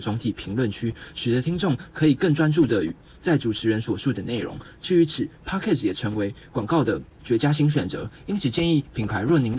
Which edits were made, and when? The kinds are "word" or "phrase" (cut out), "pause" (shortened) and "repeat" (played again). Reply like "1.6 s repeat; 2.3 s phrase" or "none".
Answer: none